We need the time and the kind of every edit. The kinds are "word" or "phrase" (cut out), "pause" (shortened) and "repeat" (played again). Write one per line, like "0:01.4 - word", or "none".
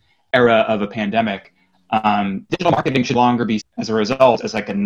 0:02.5 - word
0:03.1 - word
0:03.6 - word